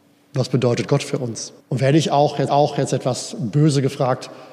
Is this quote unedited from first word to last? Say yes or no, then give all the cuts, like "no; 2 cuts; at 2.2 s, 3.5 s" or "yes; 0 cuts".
no; 2 cuts; at 1.6 s, 2.5 s